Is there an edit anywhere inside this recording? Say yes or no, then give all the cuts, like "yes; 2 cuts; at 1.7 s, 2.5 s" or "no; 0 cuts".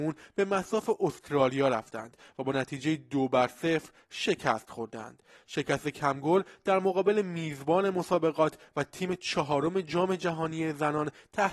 no; 0 cuts